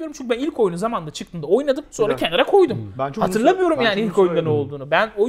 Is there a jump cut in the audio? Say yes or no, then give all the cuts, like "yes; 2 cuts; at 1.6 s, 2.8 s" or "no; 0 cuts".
no; 0 cuts